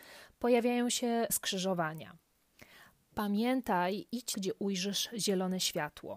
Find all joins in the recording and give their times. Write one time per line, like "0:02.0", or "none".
0:01.3
0:04.3